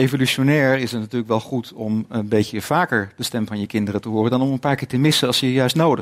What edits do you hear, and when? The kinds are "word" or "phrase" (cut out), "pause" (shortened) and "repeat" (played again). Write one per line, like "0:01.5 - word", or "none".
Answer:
none